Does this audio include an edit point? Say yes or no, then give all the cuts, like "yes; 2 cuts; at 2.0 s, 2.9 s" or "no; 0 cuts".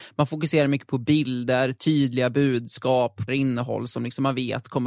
yes; 1 cut; at 3.3 s